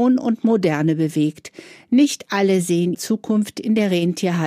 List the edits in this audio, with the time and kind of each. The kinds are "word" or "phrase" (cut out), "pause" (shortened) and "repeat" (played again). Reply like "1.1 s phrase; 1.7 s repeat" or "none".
2.9 s word